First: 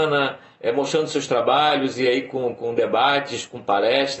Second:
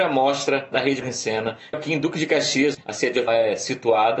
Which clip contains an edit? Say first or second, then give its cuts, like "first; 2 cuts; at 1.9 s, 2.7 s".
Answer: second; 4 cuts; at 1.0 s, 1.7 s, 2.7 s, 3.3 s